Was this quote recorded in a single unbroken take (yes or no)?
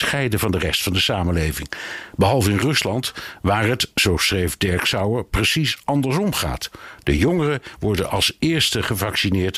yes